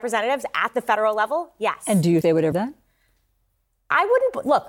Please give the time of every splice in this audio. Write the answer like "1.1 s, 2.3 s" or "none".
2.2 s, 2.5 s